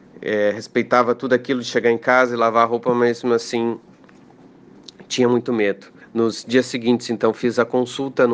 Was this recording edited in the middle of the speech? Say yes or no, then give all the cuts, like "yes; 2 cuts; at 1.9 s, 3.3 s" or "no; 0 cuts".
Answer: yes; 1 cut; at 6.0 s